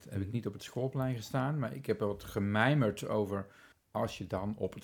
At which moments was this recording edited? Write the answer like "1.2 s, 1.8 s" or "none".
3.7 s